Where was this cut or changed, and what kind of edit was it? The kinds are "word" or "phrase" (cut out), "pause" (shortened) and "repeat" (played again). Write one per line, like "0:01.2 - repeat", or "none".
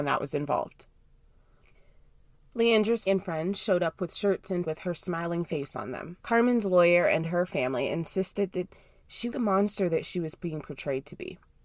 0:03.1 - word
0:04.6 - word
0:06.2 - pause
0:09.3 - word

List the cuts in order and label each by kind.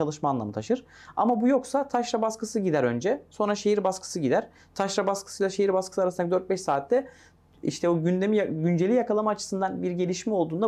none

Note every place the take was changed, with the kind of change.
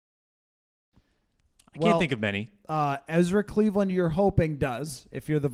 none

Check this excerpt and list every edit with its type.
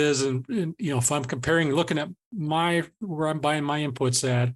none

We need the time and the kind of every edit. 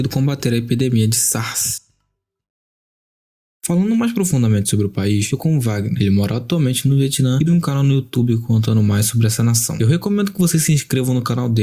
0:05.4 - word
0:07.5 - word

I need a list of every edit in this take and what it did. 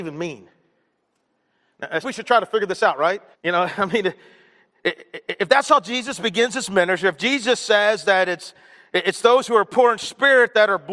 0:02.0 - phrase
0:03.3 - pause

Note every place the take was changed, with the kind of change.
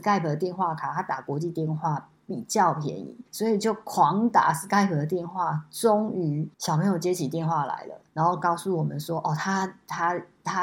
0:03.3 - pause
0:06.5 - pause
0:08.1 - pause

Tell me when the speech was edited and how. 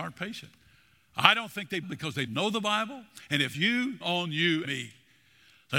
0:01.8 - phrase
0:02.3 - word
0:03.5 - word
0:04.0 - word
0:04.6 - word

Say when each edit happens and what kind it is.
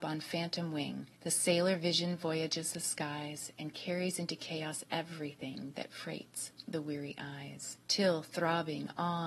0:01.1 - pause
0:07.8 - pause

